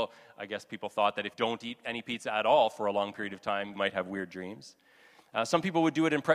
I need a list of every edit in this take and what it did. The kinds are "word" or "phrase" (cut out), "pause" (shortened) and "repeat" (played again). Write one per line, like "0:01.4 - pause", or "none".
0:01.3 - word
0:03.7 - word